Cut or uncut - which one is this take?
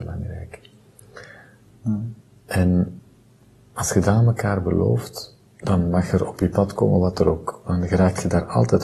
cut